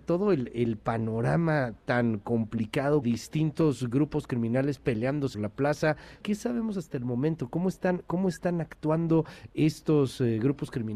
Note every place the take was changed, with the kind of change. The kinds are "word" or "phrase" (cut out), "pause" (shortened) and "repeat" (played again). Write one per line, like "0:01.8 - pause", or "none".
0:03.0 - phrase
0:05.3 - word
0:06.2 - word